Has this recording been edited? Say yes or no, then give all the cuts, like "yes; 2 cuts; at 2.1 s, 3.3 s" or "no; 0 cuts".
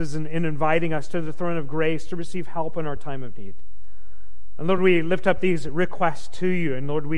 no; 0 cuts